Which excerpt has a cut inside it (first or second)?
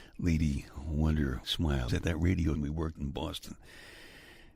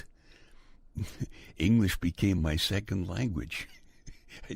first